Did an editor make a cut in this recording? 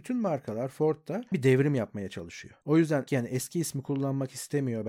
yes; 3 cuts; at 1.3 s, 2.6 s, 3.1 s

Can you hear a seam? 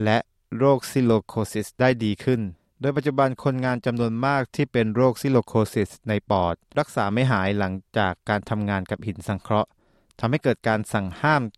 no; 0 cuts

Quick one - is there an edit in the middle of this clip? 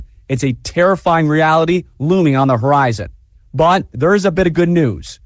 no; 0 cuts

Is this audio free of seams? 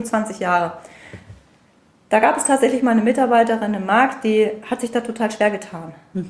yes; 0 cuts

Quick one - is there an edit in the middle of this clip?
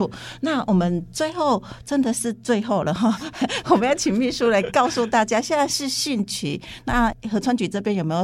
no; 0 cuts

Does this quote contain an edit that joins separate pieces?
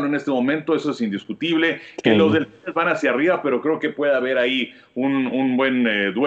yes; 1 cut; at 5.3 s

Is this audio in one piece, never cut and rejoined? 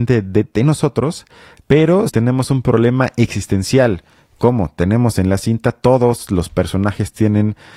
no; 1 cut; at 2.1 s

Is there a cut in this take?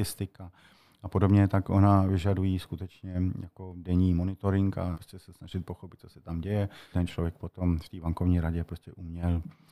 yes; 2 cuts; at 4.9 s, 6.9 s

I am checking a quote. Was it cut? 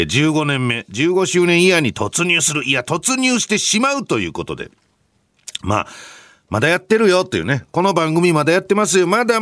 no; 0 cuts

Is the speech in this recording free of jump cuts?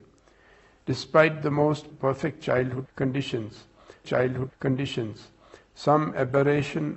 no; 1 cut; at 4.0 s

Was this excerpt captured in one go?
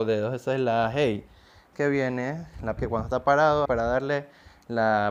no; 3 cuts; at 1.7 s, 2.8 s, 3.7 s

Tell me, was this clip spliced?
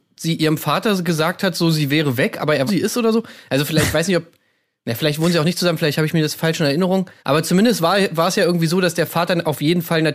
yes; 2 cuts; at 2.7 s, 7.2 s

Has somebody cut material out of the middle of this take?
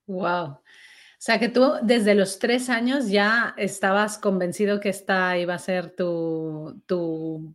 no; 0 cuts

